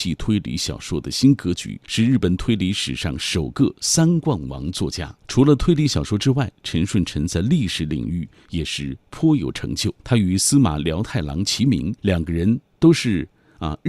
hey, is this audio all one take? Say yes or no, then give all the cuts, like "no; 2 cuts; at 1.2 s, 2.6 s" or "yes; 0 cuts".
no; 4 cuts; at 1.8 s, 5.2 s, 10.0 s, 12.0 s